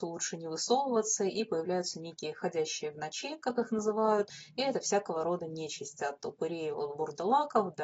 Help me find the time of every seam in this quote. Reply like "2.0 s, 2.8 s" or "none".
none